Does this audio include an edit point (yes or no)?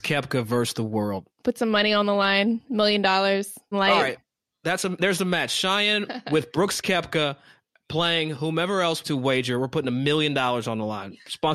yes